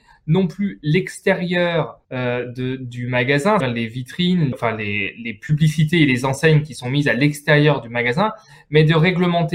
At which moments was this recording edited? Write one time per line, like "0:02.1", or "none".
0:02.0
0:03.6
0:04.5